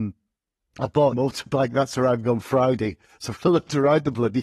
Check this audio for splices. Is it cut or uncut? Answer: cut